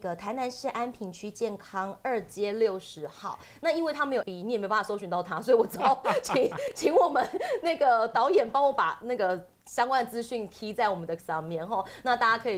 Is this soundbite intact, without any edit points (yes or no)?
no